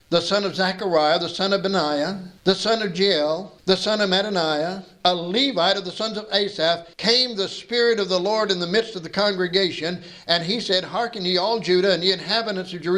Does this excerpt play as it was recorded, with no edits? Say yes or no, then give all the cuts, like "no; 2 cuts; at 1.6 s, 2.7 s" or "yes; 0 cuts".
no; 3 cuts; at 2.4 s, 3.6 s, 6.9 s